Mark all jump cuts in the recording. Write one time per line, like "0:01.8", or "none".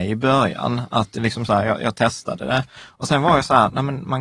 none